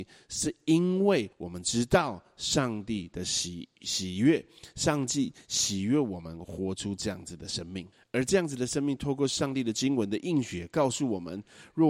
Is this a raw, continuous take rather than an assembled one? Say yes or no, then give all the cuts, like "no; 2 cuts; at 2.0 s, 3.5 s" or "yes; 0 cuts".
no; 2 cuts; at 1.3 s, 7.9 s